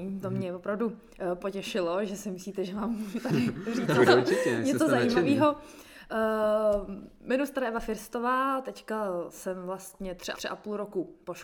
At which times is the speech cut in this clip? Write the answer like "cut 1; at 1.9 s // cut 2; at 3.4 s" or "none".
cut 1; at 4.1 s // cut 2; at 10.3 s